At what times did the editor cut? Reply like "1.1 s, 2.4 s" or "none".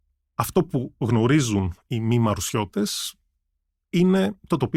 none